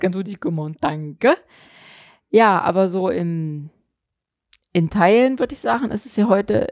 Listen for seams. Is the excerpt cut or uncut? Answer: uncut